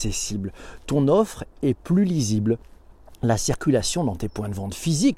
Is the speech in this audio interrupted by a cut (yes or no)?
no